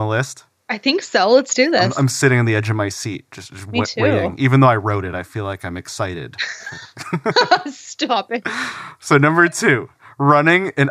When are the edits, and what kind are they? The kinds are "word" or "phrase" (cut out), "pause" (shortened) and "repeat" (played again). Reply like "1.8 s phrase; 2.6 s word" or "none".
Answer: none